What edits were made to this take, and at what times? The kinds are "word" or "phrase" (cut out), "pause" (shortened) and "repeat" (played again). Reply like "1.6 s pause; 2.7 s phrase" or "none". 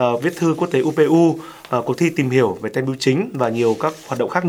none

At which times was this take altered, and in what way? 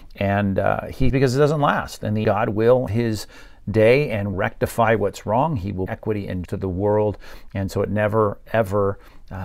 1.1 s word; 2.2 s word; 2.9 s word; 4.3 s word; 5.9 s word; 6.5 s word

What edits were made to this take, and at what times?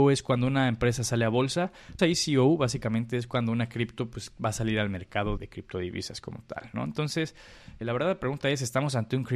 2.0 s word; 5.4 s word; 7.8 s word

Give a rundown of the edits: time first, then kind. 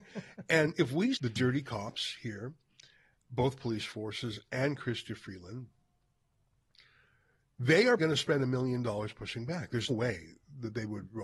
1.1 s word; 3.2 s word; 8.0 s word; 9.9 s word

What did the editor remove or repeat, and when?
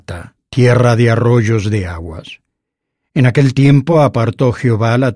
none

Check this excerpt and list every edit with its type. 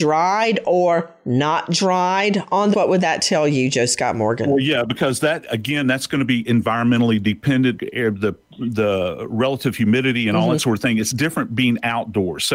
2.7 s word; 7.8 s word

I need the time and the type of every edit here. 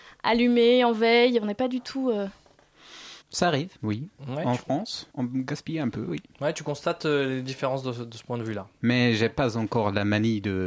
3.2 s pause; 3.8 s pause; 5.1 s pause

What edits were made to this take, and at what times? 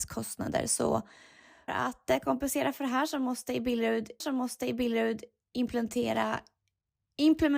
1.7 s word; 4.2 s repeat

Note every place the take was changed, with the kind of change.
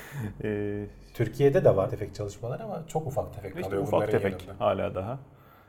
1.9 s word

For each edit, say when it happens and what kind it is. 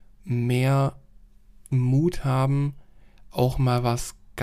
none

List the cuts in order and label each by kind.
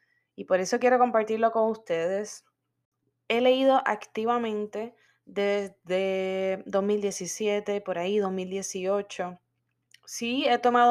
5.1 s pause

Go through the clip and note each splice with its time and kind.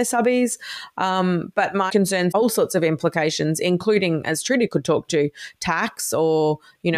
1.9 s word; 2.3 s word

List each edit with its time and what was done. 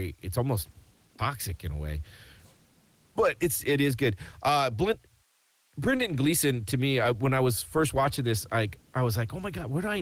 none

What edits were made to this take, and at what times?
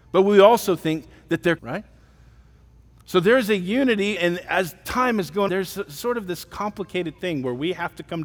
1.6 s word; 4.2 s word; 5.5 s word

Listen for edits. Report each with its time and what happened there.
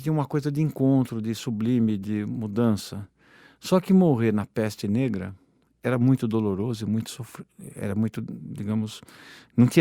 none

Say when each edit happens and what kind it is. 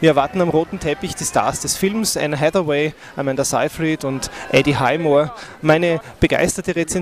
none

